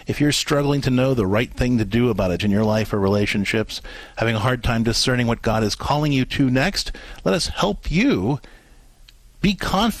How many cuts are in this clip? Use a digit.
1